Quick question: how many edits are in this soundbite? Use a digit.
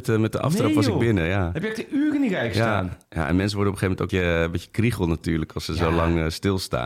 2